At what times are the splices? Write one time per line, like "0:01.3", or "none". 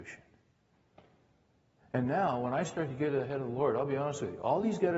none